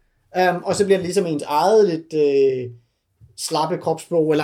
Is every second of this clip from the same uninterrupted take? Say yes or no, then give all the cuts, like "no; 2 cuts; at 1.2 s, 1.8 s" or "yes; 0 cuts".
yes; 0 cuts